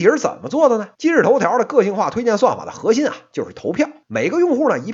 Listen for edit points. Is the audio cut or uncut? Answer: cut